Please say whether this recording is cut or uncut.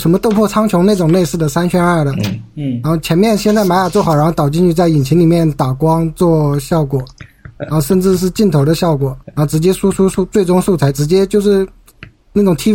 cut